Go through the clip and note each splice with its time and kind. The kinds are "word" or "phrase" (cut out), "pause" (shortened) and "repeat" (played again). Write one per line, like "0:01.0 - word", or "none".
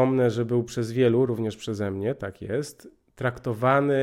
none